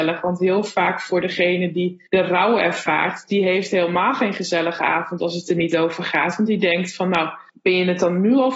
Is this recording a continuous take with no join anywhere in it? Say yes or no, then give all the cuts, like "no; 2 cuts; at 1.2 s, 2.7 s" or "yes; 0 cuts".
no; 2 cuts; at 2.1 s, 7.5 s